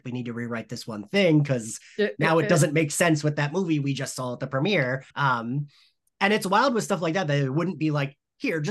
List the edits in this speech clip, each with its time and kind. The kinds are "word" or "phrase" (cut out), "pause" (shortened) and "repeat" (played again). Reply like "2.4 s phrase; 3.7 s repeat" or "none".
5.1 s pause